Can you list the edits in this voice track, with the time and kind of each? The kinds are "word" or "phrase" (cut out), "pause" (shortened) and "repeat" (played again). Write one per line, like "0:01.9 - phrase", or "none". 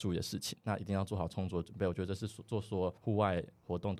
0:03.0 - pause